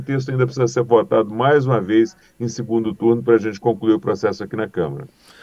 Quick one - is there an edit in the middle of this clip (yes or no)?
no